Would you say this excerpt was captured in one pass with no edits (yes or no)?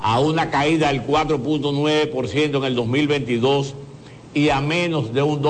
yes